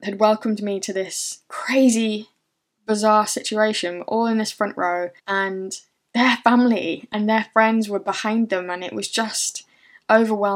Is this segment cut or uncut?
cut